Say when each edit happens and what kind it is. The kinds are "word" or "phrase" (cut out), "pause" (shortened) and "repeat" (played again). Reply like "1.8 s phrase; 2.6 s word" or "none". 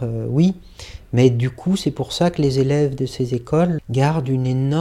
3.8 s word